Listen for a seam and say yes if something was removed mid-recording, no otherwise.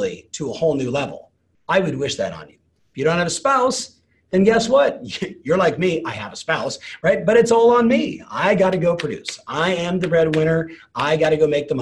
no